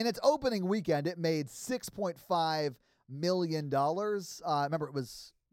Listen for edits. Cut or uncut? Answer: uncut